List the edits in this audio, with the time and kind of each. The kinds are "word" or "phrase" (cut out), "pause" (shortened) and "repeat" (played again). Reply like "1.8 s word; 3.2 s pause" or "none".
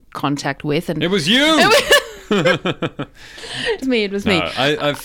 3.8 s word